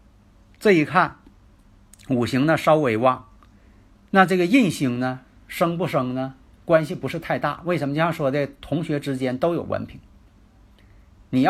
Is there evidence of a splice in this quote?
no; 0 cuts

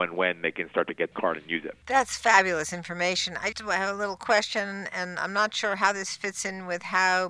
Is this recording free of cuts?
no; 3 cuts; at 1.1 s, 1.8 s, 3.5 s

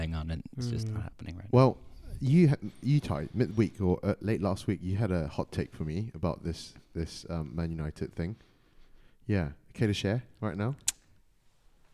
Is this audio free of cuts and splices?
yes; 0 cuts

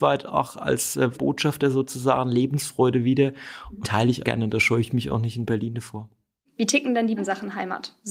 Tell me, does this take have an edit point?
yes; 4 cuts; at 1.1 s, 3.8 s, 4.2 s, 7.2 s

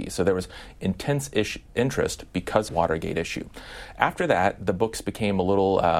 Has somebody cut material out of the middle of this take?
yes; 1 cut; at 2.7 s

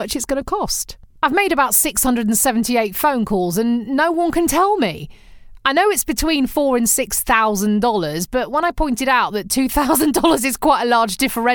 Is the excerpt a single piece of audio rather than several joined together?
yes; 0 cuts

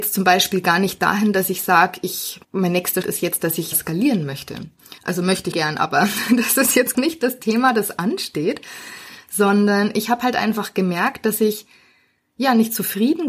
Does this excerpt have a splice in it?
yes; 6 cuts; at 2.4 s, 3.0 s, 3.7 s, 5.0 s, 5.5 s, 6.9 s

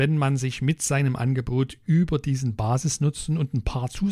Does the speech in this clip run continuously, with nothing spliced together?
yes; 0 cuts

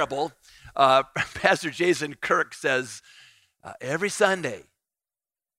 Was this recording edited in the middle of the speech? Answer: no; 0 cuts

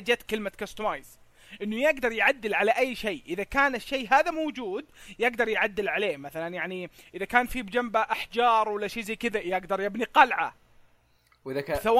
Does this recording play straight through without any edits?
yes; 0 cuts

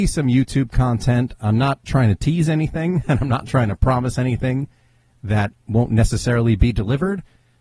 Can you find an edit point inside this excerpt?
no; 0 cuts

